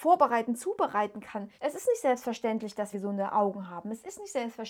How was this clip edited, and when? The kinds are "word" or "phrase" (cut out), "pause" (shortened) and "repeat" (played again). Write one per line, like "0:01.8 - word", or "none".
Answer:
0:01.5 - pause
0:02.9 - phrase